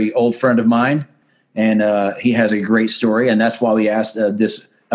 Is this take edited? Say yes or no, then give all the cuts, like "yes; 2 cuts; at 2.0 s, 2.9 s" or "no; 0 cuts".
no; 0 cuts